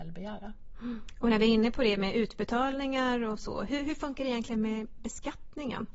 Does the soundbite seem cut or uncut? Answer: uncut